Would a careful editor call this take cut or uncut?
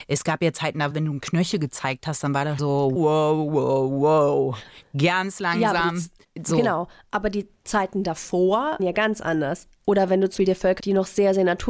cut